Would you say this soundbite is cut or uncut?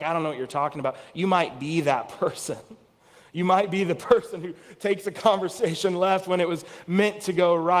uncut